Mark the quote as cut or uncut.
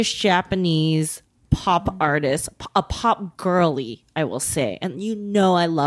uncut